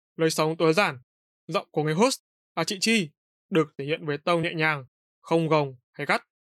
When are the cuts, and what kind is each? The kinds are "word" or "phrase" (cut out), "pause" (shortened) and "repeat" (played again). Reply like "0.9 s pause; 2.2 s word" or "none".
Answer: none